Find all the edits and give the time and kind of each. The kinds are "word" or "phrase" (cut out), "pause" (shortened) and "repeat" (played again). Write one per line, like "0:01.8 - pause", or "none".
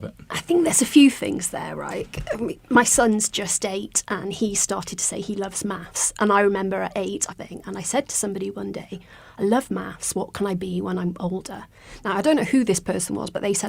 0:07.3 - phrase